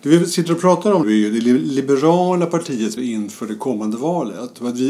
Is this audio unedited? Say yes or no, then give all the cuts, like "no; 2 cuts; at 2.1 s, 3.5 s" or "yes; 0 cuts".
no; 2 cuts; at 1.0 s, 3.0 s